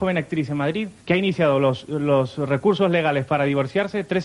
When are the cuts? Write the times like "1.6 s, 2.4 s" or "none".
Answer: 1.0 s